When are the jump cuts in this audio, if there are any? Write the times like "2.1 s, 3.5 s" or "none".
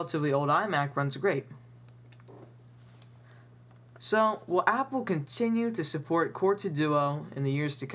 none